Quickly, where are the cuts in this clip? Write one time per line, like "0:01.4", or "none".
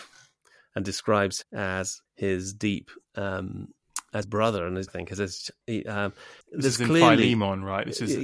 0:01.4
0:02.1
0:03.1
0:04.2
0:04.9
0:06.4